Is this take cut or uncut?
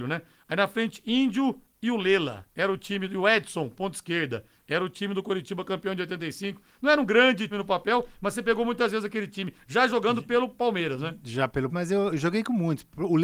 cut